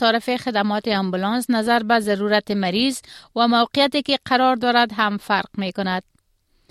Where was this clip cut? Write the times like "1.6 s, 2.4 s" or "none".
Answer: none